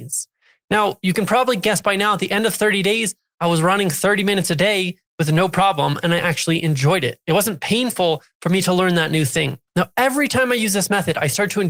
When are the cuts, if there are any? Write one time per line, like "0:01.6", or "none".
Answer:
0:09.7